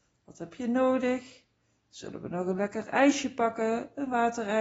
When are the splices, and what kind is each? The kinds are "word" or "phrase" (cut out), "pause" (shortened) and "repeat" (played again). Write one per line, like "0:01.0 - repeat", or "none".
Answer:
none